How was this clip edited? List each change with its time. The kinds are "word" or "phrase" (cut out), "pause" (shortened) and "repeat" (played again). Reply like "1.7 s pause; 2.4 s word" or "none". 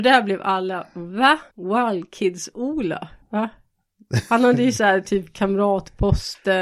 1.5 s pause; 3.2 s pause